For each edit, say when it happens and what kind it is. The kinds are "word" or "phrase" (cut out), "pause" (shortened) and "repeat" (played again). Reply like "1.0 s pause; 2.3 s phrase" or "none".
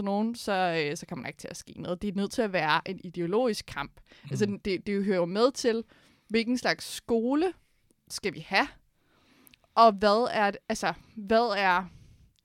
none